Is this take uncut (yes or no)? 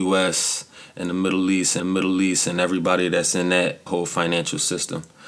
no